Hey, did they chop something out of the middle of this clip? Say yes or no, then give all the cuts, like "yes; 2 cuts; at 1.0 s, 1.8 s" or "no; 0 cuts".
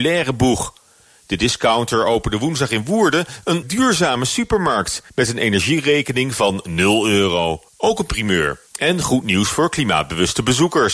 yes; 4 cuts; at 3.6 s, 5.1 s, 7.7 s, 8.7 s